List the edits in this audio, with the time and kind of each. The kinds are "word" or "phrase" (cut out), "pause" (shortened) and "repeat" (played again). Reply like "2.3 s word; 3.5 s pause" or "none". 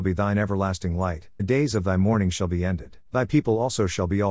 1.4 s word; 3.0 s pause